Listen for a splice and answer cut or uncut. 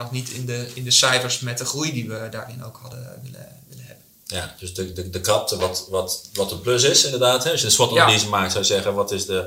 uncut